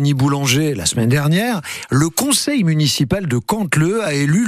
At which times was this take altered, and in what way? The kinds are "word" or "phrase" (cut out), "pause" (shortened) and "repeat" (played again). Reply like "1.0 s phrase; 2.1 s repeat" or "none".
none